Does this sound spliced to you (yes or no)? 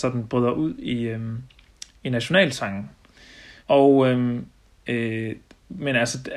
yes